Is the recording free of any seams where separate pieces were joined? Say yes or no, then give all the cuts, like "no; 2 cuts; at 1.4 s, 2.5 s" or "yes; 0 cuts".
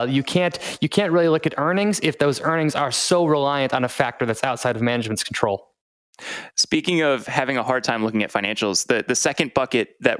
yes; 0 cuts